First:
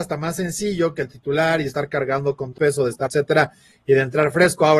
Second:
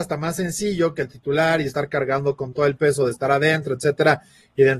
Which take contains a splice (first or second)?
first